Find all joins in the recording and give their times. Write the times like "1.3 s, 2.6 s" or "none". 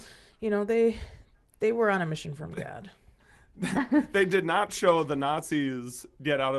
none